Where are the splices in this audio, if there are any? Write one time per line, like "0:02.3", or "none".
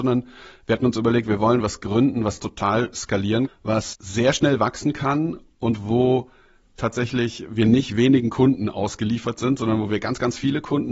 0:03.5
0:03.9